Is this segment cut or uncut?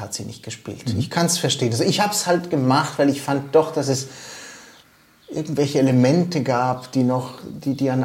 uncut